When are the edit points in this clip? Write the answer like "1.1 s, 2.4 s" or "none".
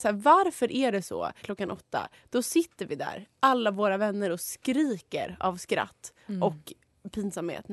1.4 s